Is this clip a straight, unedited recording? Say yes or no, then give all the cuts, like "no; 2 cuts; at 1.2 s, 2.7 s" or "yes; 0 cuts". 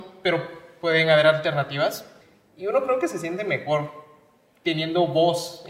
yes; 0 cuts